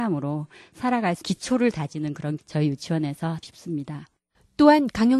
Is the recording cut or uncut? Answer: cut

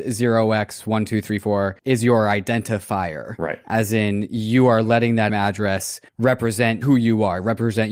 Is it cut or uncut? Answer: cut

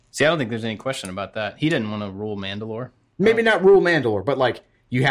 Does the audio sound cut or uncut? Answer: uncut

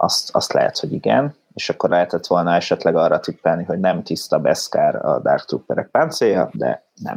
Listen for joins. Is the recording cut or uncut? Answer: uncut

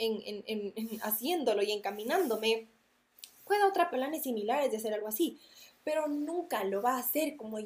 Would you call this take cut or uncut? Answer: cut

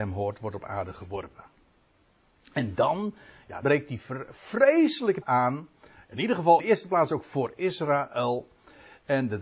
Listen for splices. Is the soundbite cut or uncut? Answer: cut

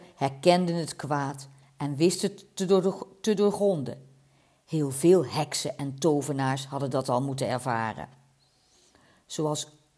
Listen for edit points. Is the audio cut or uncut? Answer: uncut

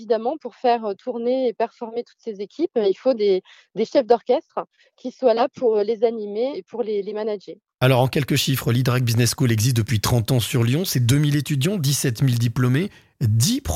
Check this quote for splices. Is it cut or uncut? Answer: uncut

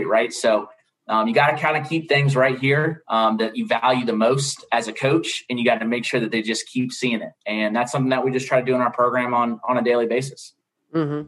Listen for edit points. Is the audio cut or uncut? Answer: cut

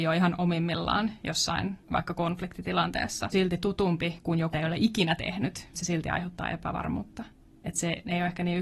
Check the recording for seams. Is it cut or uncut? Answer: cut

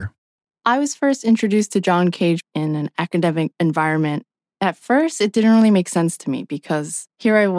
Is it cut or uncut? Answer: uncut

